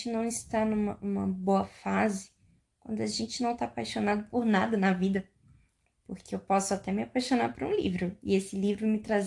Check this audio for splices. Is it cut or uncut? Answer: uncut